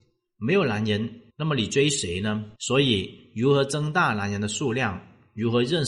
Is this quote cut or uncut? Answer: cut